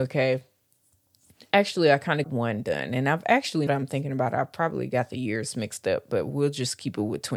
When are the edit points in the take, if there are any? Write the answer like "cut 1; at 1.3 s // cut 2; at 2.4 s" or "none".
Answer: cut 1; at 2.2 s // cut 2; at 3.7 s